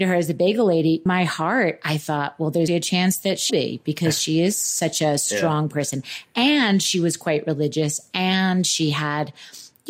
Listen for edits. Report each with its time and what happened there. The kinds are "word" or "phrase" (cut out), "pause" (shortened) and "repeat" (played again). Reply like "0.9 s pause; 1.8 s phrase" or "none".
1.1 s phrase; 2.7 s word; 3.5 s word